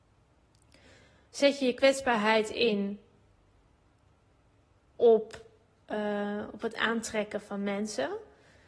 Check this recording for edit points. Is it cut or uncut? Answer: uncut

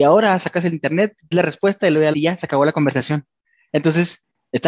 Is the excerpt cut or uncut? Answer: cut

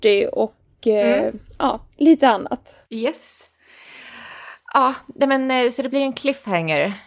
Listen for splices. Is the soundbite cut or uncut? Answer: cut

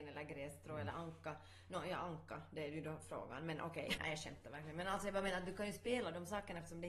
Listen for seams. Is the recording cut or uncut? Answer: cut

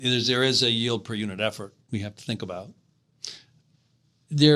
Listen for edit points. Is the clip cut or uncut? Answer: uncut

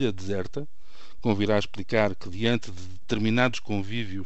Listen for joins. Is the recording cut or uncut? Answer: uncut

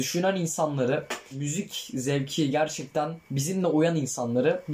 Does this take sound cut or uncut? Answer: cut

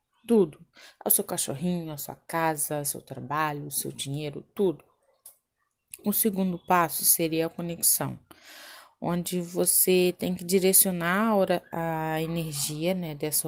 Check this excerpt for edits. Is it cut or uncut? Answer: uncut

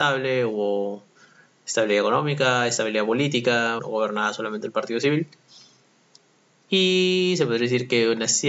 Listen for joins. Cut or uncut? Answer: cut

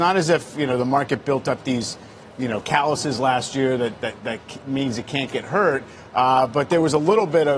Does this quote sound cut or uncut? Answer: uncut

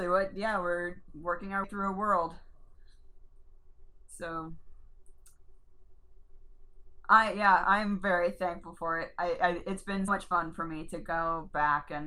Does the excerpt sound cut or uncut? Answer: cut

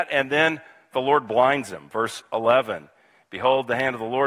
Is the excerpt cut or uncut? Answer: uncut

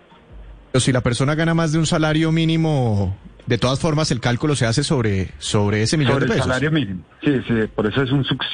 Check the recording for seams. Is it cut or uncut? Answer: uncut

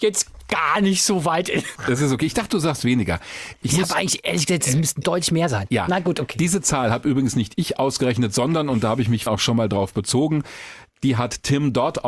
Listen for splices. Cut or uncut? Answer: cut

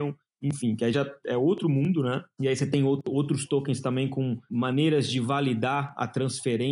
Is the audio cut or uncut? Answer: uncut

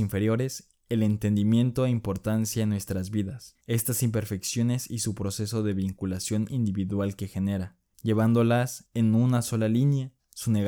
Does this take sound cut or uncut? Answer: cut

